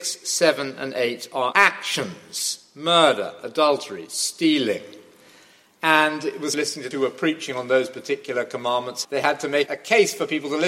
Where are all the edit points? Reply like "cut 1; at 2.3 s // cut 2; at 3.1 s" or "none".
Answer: cut 1; at 1.5 s // cut 2; at 6.5 s // cut 3; at 6.9 s // cut 4; at 9.0 s // cut 5; at 9.7 s